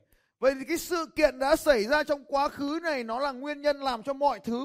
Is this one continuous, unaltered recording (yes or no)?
yes